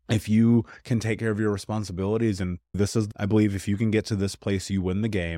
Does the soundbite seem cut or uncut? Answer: cut